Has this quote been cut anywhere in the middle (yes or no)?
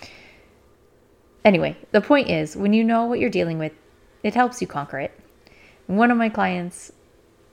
no